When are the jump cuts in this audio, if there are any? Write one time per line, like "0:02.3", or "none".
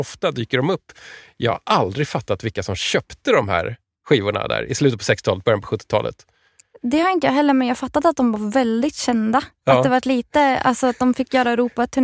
none